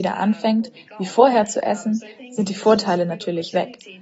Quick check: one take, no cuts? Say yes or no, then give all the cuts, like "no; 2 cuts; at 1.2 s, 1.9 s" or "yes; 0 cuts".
yes; 0 cuts